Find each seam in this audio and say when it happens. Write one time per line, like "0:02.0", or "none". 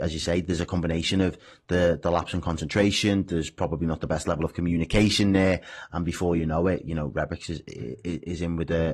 none